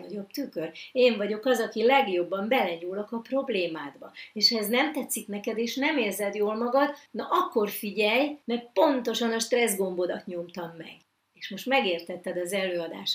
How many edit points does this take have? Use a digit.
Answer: 3